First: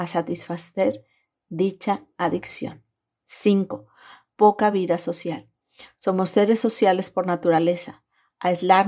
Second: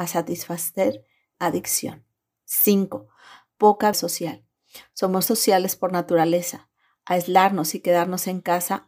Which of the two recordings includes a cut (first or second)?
second